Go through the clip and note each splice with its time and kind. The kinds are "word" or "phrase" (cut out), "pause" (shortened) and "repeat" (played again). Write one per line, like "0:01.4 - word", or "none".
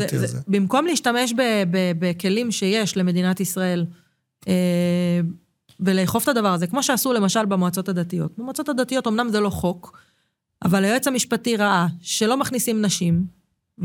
none